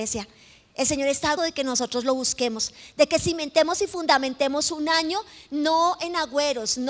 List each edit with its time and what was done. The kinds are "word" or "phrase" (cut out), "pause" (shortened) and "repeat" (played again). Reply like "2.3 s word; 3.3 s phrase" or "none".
1.4 s word